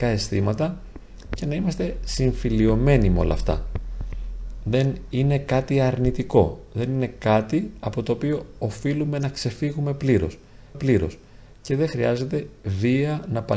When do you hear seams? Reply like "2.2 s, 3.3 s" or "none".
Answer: 10.7 s